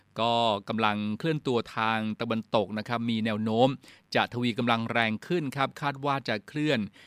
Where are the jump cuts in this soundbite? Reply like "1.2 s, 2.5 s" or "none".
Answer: none